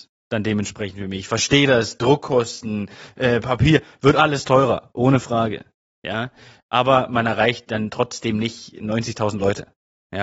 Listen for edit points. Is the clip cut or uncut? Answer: uncut